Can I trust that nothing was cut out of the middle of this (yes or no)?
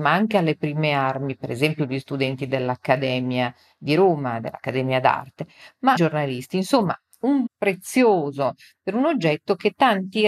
no